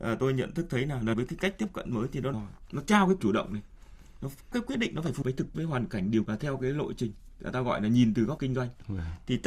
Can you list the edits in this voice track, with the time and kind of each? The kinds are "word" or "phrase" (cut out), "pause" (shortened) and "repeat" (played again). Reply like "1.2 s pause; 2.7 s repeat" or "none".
1.1 s word; 2.3 s word; 3.2 s word; 4.5 s word; 5.2 s word; 5.5 s word; 6.3 s word; 8.4 s word